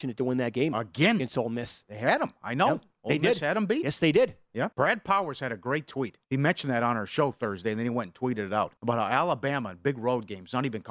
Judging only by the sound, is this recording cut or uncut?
cut